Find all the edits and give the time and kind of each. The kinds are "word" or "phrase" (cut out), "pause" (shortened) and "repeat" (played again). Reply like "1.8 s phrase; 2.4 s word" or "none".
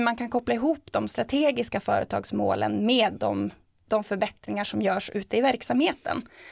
none